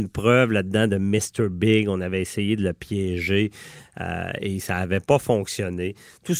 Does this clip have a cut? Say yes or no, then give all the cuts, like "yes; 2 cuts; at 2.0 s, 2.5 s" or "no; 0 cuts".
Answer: no; 0 cuts